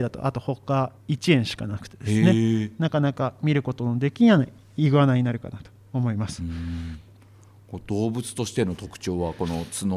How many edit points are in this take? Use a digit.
1